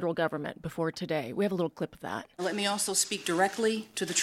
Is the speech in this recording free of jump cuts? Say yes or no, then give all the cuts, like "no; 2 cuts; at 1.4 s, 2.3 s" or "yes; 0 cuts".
yes; 0 cuts